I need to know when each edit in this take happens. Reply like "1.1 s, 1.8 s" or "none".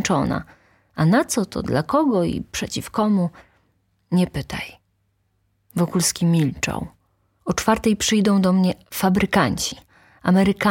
none